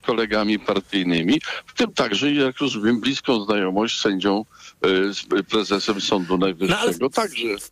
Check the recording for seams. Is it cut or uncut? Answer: uncut